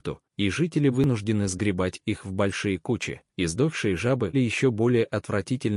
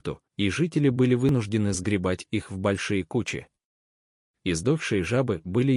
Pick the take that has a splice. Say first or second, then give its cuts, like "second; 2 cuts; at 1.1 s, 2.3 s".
first; 3 cuts; at 0.9 s, 3.3 s, 4.3 s